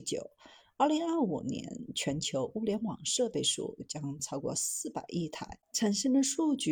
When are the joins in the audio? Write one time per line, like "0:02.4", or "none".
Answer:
0:05.6